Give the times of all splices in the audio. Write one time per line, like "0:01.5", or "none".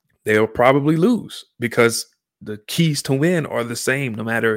none